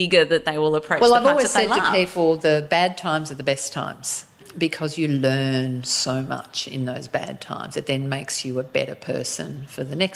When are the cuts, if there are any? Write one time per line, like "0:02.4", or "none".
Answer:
none